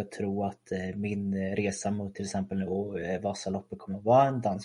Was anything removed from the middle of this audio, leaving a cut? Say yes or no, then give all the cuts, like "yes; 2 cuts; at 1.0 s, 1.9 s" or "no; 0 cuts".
no; 0 cuts